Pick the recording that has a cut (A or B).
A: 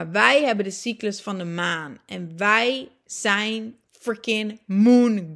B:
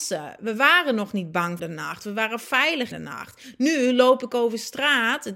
B